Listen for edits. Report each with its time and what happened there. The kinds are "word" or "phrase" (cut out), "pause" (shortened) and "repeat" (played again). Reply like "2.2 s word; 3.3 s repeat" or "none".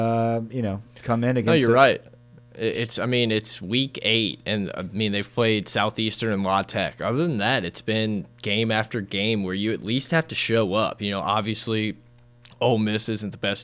none